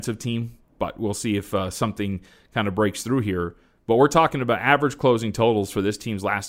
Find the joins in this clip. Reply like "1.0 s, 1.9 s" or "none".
none

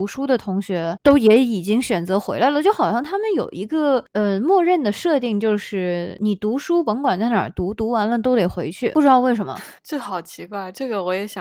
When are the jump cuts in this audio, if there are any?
9.8 s

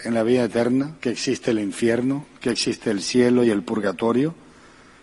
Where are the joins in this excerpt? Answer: 1.0 s

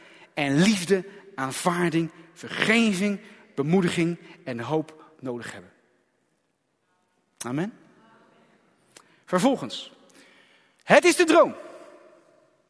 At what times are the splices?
5.1 s

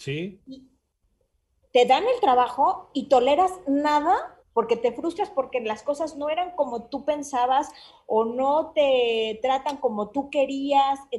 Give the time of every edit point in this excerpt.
4.4 s

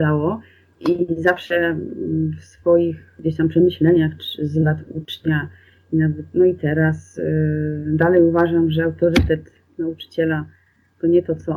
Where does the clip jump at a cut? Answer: none

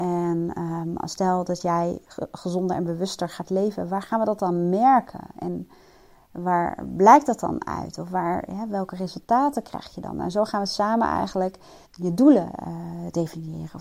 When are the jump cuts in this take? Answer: 11.9 s

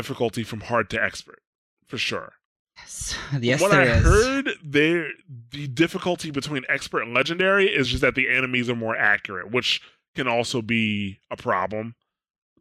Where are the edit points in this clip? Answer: none

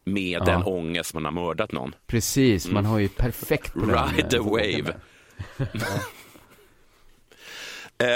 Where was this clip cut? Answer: 1.1 s, 2.0 s, 3.7 s

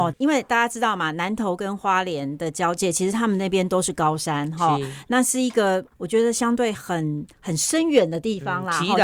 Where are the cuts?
7.3 s

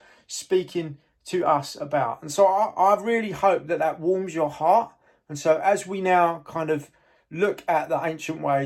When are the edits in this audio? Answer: none

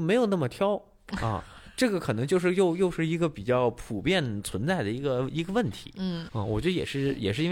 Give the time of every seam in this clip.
6.3 s

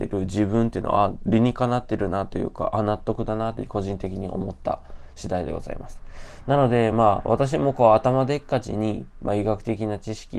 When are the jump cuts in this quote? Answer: none

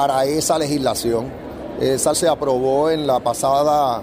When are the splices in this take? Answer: 2.1 s

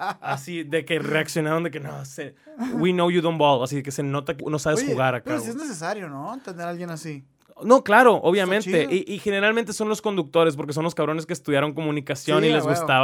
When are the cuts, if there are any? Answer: 4.4 s

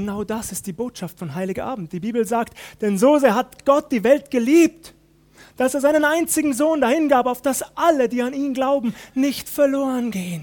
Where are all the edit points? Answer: none

